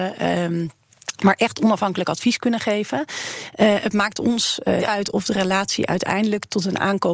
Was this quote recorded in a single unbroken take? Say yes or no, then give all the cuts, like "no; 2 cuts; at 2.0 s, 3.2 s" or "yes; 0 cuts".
no; 1 cut; at 4.8 s